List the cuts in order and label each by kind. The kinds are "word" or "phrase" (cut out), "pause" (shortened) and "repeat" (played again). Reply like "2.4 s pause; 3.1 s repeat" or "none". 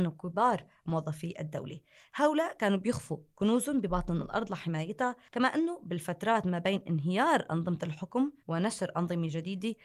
8.4 s pause